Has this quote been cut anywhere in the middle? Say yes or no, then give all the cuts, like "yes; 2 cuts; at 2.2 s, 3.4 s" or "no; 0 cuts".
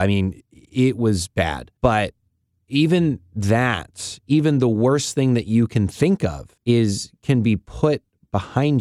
yes; 2 cuts; at 1.8 s, 6.6 s